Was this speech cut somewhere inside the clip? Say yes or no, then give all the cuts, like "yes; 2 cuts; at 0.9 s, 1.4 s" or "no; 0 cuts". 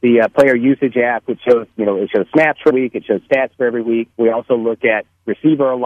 yes; 2 cuts; at 2.7 s, 4.1 s